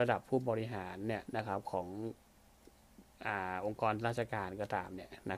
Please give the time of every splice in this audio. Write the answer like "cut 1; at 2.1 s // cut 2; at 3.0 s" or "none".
cut 1; at 1.3 s